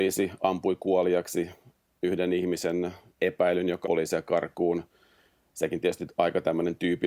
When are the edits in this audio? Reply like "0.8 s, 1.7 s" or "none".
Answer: 3.2 s, 3.8 s